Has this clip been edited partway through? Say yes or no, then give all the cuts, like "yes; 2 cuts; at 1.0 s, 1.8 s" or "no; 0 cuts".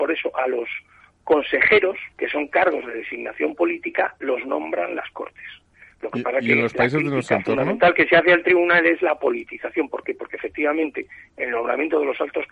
yes; 2 cuts; at 2.1 s, 5.9 s